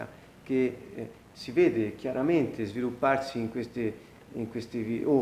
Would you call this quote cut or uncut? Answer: uncut